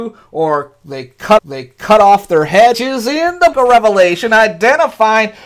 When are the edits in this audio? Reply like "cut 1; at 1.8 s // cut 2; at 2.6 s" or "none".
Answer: cut 1; at 1.4 s // cut 2; at 2.7 s // cut 3; at 3.5 s